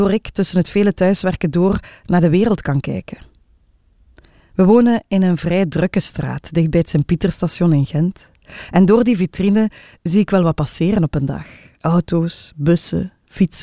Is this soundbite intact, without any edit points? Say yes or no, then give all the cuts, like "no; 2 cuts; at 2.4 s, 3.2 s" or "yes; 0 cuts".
yes; 0 cuts